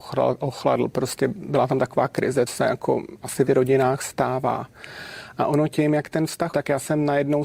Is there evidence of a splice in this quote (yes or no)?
yes